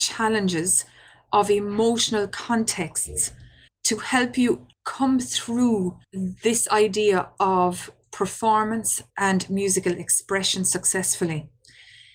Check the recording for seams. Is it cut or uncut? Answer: cut